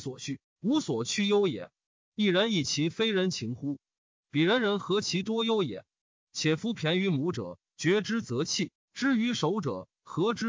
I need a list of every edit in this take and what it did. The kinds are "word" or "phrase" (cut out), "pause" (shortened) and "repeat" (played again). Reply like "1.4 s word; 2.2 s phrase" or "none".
none